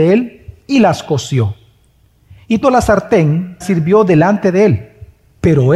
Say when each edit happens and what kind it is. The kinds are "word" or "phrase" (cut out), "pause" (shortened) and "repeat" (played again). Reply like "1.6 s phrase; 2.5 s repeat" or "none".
2.6 s word; 3.6 s word